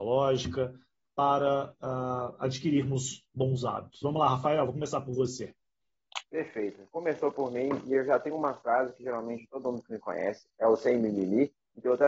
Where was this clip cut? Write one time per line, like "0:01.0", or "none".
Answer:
0:06.3